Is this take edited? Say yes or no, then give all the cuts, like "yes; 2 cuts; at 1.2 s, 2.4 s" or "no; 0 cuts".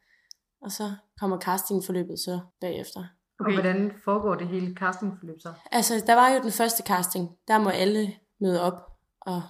yes; 1 cut; at 2.5 s